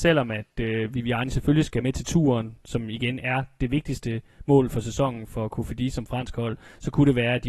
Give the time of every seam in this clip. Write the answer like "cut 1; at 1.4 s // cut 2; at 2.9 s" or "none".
none